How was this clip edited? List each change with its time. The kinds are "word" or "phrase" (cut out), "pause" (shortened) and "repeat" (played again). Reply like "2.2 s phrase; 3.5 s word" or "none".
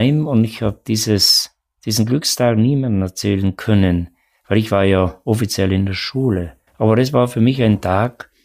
6.7 s pause